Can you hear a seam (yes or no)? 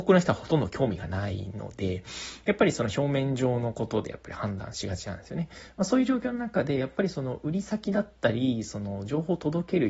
no